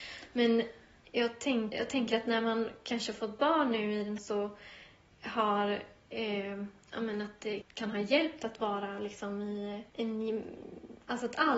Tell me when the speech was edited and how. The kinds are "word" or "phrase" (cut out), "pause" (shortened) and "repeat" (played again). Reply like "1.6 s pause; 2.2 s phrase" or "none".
1.7 s word; 4.2 s phrase; 6.8 s pause; 7.6 s word; 9.9 s pause